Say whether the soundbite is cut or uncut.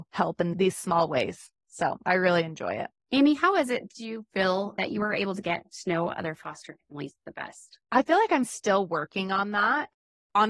cut